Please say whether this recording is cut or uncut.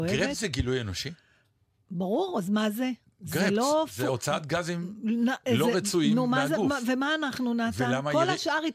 uncut